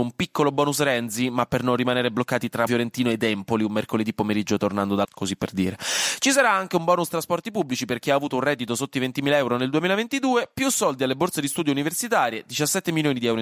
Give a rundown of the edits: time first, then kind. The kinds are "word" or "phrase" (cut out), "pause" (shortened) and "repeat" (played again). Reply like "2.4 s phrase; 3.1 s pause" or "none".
2.7 s word; 5.0 s word